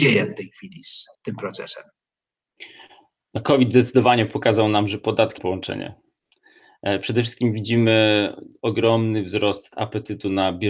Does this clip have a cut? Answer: yes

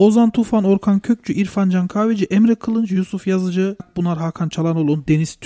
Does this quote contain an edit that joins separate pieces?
yes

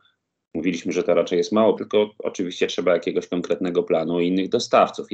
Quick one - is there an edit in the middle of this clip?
yes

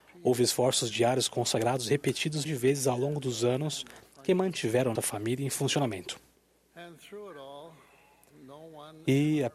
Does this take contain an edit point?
yes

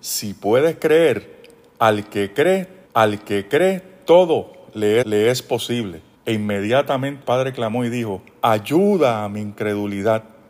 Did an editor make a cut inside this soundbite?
yes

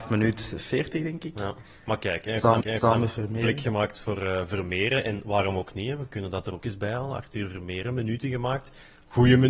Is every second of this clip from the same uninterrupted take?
no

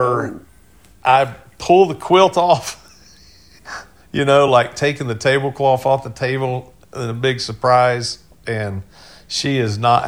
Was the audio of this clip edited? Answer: no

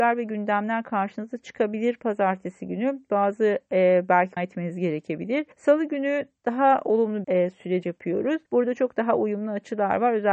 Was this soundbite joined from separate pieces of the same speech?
yes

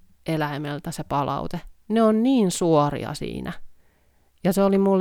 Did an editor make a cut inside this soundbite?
no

